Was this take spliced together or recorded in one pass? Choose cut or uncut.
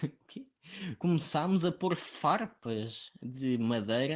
uncut